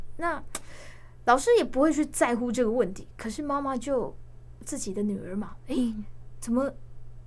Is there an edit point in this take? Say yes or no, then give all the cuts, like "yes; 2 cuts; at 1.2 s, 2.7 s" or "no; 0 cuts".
no; 0 cuts